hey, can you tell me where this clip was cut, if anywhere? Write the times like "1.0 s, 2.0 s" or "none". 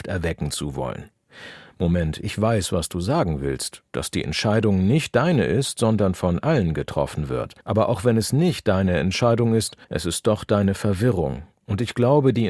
7.6 s, 9.8 s